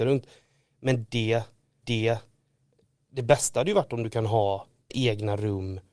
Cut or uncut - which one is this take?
cut